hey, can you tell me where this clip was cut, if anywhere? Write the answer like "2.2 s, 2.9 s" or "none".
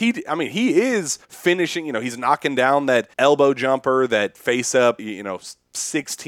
1.2 s, 3.1 s, 5.0 s